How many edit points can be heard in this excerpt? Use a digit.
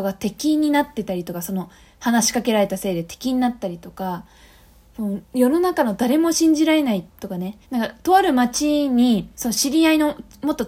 4